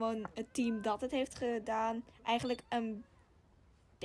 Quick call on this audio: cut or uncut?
cut